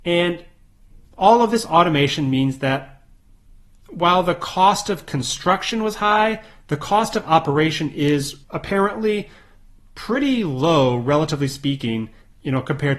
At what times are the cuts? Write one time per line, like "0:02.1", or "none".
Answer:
0:08.4